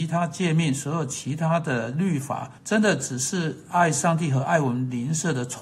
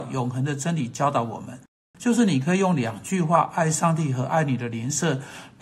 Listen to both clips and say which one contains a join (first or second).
first